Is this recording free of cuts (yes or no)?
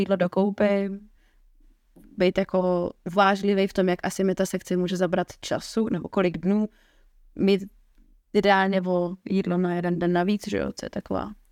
yes